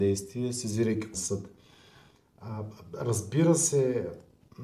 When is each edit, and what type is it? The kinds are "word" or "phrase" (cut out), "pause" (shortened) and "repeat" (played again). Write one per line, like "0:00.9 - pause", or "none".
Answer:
0:01.1 - word